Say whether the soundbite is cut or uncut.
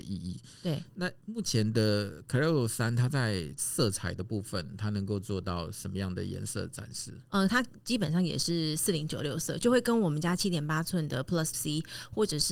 cut